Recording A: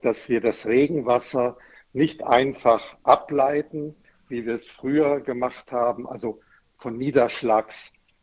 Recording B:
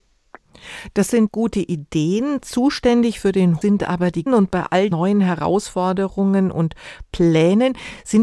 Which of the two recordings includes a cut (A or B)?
B